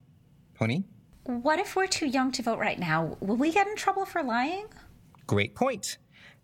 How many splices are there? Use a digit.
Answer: 0